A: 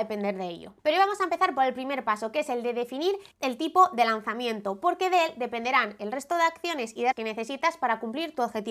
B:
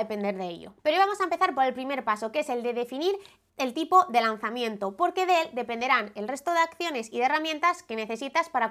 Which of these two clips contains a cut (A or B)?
A